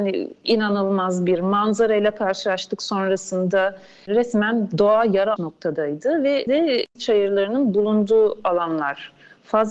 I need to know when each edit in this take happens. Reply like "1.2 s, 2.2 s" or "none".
5.4 s, 6.5 s, 7.0 s

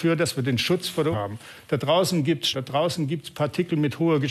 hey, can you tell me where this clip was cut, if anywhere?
1.1 s, 2.5 s

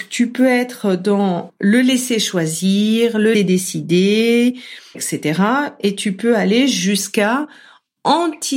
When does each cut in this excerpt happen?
3.3 s, 4.9 s

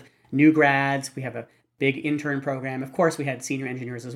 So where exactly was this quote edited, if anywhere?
none

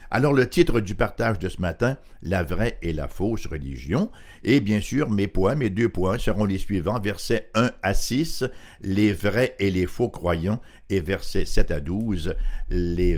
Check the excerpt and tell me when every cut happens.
none

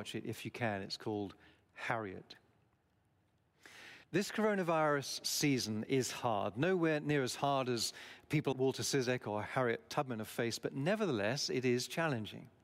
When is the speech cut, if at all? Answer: 4.0 s, 8.5 s

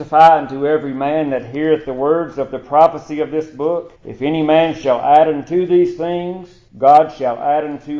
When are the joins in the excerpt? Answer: 4.0 s, 6.7 s

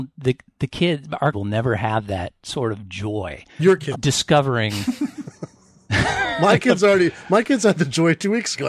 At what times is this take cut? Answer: 1.3 s, 3.5 s, 3.9 s

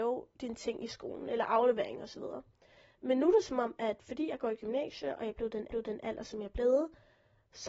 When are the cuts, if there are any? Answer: 5.7 s

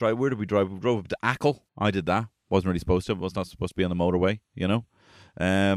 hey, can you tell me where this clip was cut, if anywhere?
1.7 s

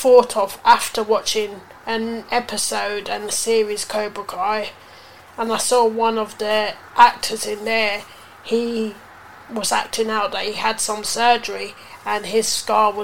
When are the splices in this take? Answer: none

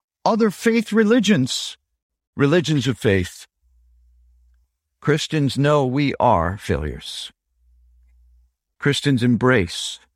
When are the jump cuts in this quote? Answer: none

